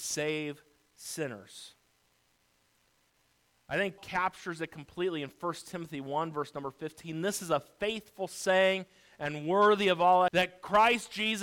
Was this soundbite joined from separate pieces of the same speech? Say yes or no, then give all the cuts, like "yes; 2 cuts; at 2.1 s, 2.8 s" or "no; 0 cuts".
yes; 2 cuts; at 4.0 s, 10.3 s